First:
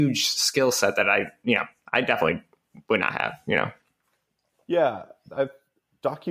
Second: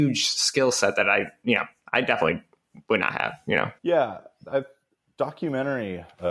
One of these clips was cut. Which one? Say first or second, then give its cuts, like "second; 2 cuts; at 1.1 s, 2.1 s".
second; 1 cut; at 3.8 s